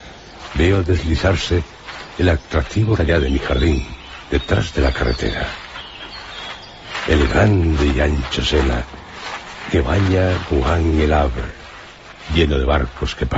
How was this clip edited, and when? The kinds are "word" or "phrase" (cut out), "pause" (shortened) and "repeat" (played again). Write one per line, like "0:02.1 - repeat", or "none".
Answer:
0:03.0 - phrase